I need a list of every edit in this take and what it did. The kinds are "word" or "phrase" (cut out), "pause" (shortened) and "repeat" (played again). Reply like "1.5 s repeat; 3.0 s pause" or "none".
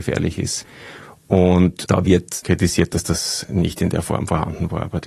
none